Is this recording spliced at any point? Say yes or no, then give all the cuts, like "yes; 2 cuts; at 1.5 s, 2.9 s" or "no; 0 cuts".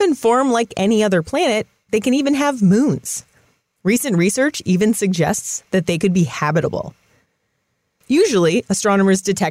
no; 0 cuts